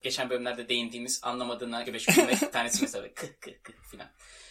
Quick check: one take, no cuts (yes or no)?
no